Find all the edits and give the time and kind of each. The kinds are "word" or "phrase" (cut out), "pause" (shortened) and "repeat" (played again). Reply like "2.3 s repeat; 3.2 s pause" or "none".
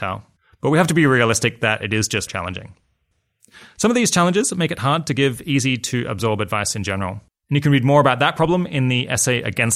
2.3 s word